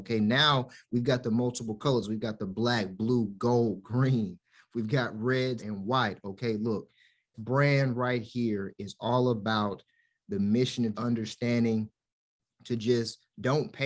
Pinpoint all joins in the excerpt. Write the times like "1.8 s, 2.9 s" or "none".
5.6 s, 7.3 s, 10.9 s